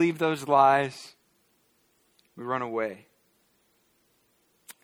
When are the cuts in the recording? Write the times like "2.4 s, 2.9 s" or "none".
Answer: none